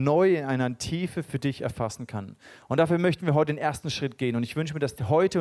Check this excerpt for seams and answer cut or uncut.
uncut